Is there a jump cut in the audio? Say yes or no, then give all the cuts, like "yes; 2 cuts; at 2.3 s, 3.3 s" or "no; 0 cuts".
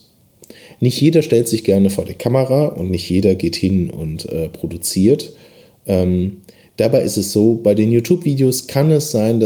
no; 0 cuts